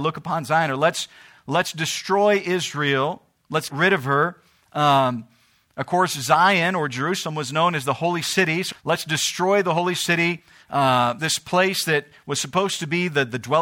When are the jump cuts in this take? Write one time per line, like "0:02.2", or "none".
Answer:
0:03.7
0:08.7
0:11.2